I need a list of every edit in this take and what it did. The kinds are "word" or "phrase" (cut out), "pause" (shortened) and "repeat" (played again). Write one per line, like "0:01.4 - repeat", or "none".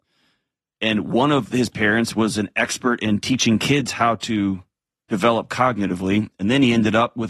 none